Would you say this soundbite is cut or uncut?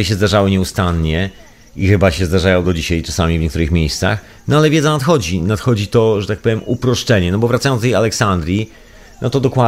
uncut